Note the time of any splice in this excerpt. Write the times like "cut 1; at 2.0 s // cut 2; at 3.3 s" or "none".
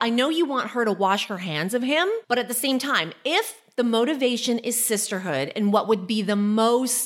cut 1; at 2.2 s